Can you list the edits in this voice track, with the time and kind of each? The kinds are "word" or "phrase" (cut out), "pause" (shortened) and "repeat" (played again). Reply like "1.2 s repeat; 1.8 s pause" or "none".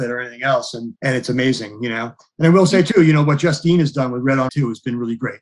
1.0 s pause; 4.5 s word